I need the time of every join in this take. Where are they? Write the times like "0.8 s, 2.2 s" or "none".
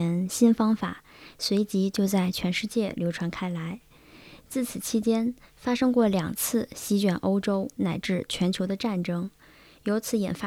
none